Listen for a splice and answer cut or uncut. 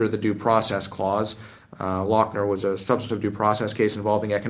uncut